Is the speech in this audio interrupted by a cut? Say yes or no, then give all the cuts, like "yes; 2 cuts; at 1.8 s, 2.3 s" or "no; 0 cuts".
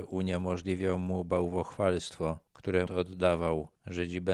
yes; 1 cut; at 2.9 s